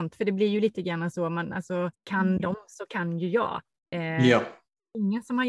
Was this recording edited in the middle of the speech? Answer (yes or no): yes